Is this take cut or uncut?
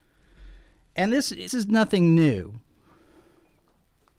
cut